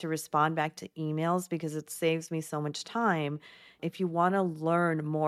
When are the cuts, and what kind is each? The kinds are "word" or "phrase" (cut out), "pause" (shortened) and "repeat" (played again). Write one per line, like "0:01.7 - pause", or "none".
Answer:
none